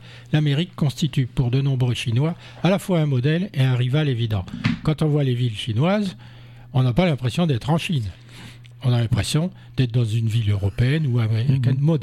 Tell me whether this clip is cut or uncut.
uncut